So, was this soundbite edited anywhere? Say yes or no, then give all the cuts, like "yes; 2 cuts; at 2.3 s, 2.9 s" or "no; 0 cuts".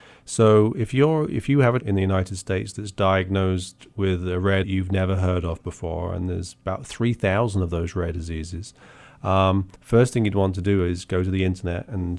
yes; 3 cuts; at 1.8 s, 4.6 s, 9.8 s